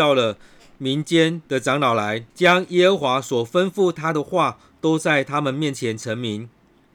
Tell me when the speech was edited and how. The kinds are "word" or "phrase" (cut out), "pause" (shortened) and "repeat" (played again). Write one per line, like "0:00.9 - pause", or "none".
0:01.5 - pause
0:02.3 - pause